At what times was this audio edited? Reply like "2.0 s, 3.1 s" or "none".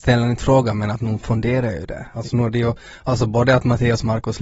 none